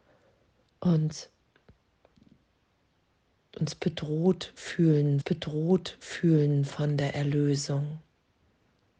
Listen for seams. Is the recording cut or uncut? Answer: cut